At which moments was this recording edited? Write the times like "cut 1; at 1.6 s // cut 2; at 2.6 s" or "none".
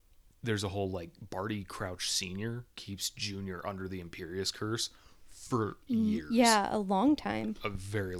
cut 1; at 5.8 s